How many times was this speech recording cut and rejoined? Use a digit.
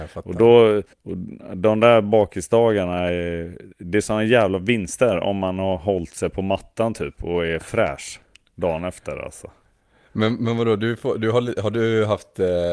2